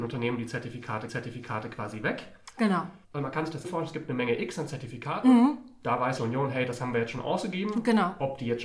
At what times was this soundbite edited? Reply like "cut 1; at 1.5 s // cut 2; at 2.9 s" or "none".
cut 1; at 1.1 s // cut 2; at 3.0 s // cut 3; at 3.6 s // cut 4; at 6.2 s